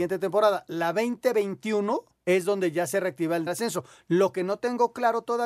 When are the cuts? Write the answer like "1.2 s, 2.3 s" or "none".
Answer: 2.2 s, 3.5 s